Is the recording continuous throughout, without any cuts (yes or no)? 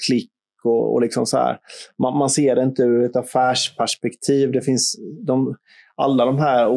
yes